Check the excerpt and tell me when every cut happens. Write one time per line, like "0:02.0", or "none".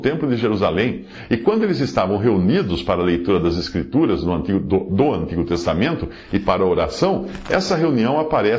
none

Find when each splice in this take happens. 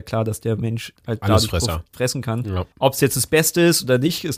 0:01.0
0:01.9
0:02.7

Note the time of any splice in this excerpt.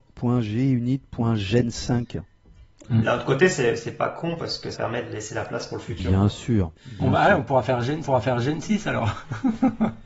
0:04.7
0:06.8
0:08.0

